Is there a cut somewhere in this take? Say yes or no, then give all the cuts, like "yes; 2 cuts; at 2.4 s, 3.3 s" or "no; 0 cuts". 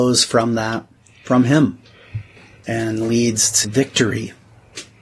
yes; 3 cuts; at 1.0 s, 2.4 s, 3.6 s